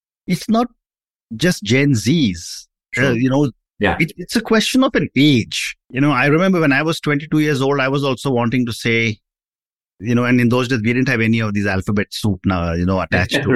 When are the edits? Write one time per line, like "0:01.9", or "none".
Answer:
0:05.8